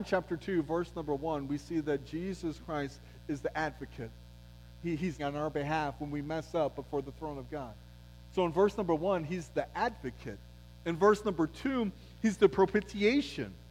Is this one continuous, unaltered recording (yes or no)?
no